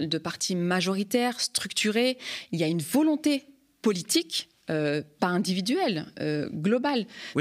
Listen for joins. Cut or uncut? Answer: uncut